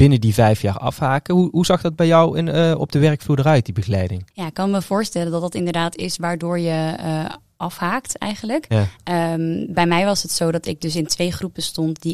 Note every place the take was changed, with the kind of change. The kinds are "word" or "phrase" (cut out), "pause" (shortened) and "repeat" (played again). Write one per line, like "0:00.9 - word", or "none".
0:04.3 - pause